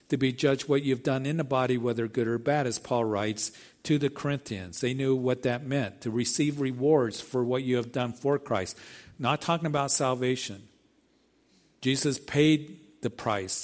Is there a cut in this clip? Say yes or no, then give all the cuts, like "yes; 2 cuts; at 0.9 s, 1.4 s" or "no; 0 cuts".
no; 0 cuts